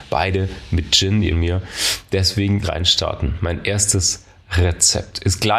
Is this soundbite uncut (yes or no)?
no